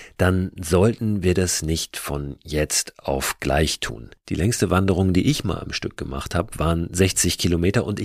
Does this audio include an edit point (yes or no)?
no